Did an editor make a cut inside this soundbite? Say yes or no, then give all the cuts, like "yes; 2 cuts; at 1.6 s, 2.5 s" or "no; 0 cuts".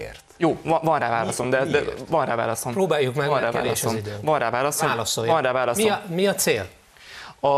no; 0 cuts